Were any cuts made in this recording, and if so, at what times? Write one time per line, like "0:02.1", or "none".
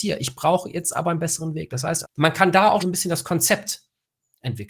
0:02.0
0:02.8

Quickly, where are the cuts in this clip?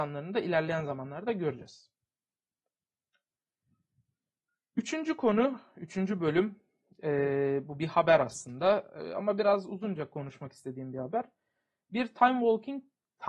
none

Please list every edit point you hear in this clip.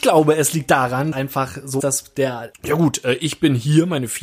0:01.1
0:01.8
0:02.5

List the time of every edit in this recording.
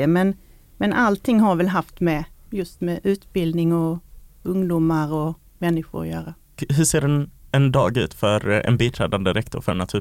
none

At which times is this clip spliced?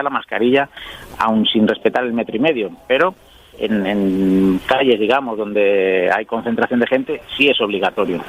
none

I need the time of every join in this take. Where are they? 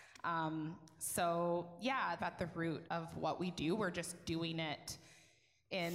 0:02.2
0:02.9

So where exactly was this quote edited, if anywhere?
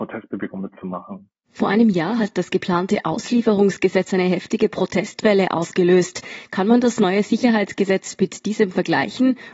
0:01.5

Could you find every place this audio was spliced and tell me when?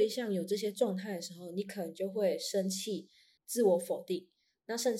0:03.4

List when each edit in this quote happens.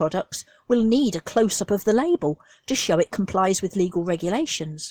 none

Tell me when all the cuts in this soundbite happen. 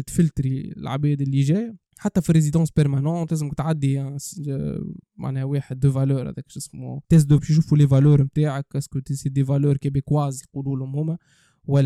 0:01.9
0:07.0
0:07.4

